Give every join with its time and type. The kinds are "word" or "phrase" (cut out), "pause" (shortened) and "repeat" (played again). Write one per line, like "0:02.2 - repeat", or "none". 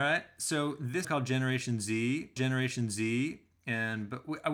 0:01.0 - phrase
0:02.4 - repeat